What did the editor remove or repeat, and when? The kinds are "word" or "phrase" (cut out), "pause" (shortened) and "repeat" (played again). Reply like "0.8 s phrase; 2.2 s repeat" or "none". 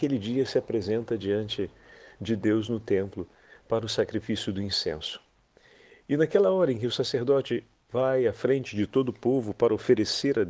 none